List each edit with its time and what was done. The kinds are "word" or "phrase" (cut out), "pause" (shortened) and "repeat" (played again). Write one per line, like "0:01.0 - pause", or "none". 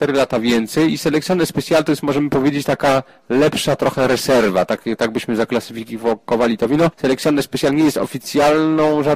none